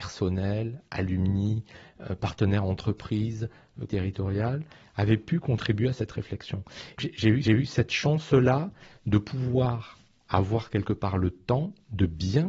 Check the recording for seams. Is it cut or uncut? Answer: cut